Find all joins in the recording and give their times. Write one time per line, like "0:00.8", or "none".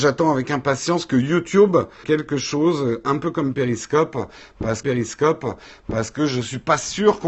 0:02.0
0:04.8